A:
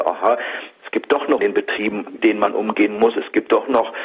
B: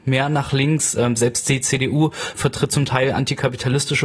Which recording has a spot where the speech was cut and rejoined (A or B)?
A